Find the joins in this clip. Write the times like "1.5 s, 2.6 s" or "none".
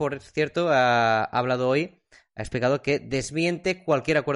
none